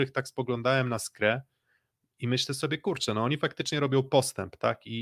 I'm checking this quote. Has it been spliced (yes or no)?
no